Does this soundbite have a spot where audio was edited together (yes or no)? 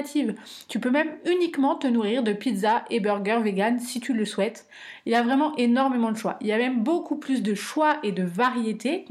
no